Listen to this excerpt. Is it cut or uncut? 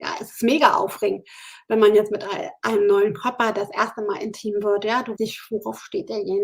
cut